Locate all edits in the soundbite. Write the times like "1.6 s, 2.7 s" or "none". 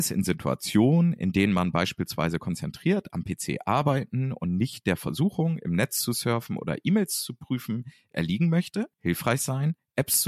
8.9 s